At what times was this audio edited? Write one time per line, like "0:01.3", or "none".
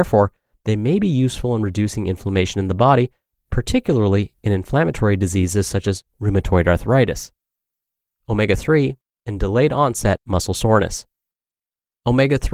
none